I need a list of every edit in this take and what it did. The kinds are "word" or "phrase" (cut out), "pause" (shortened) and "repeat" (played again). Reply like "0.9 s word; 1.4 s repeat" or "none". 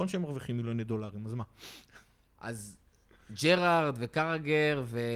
none